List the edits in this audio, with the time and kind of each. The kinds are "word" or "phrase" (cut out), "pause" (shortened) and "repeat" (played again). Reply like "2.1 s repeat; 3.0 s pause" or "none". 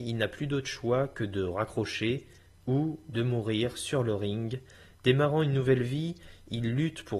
none